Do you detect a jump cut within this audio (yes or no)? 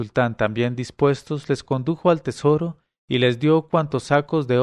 no